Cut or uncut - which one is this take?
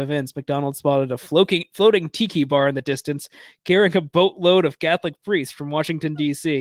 uncut